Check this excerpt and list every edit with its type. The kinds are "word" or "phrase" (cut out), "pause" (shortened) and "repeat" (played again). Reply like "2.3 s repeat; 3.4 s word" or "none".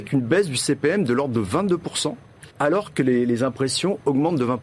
2.5 s pause